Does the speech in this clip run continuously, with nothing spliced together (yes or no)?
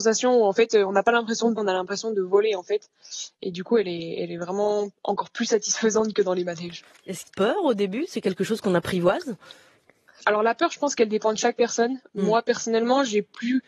no